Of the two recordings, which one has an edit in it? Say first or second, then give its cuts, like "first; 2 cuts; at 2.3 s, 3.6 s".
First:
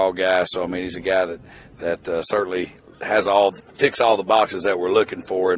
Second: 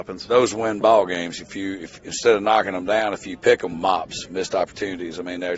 second; 1 cut; at 3.7 s